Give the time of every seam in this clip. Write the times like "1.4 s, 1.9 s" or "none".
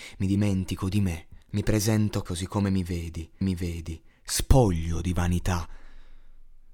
1.4 s, 2.3 s, 3.4 s